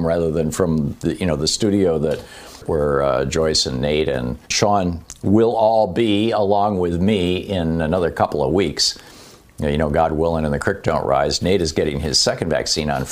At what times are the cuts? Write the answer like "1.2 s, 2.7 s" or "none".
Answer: 4.4 s